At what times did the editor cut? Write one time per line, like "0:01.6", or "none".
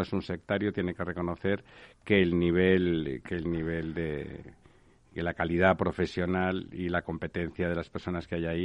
none